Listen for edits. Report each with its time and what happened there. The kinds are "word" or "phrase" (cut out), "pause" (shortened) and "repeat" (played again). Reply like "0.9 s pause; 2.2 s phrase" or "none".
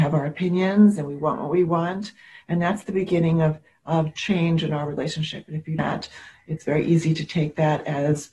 5.8 s phrase